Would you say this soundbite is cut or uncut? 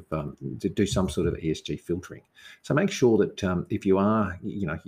uncut